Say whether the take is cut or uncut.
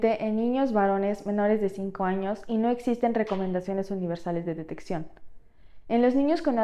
uncut